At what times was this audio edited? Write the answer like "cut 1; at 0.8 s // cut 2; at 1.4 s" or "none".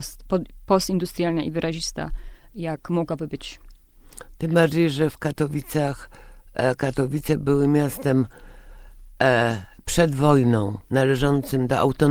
cut 1; at 10.9 s